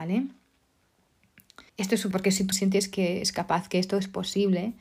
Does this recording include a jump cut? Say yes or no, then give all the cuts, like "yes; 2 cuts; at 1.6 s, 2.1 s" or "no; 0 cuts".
yes; 3 cuts; at 1.7 s, 2.1 s, 2.5 s